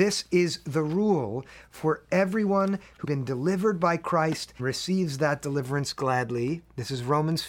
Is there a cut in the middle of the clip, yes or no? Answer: yes